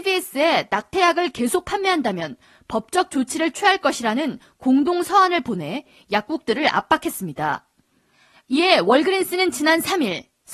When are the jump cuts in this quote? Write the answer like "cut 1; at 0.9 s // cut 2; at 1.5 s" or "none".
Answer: none